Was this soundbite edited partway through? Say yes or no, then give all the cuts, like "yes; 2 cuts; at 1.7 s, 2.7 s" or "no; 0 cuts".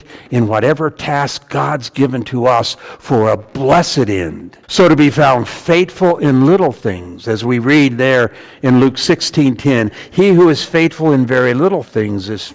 yes; 1 cut; at 4.6 s